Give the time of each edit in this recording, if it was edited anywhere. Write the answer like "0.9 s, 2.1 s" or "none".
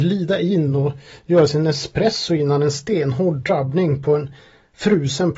none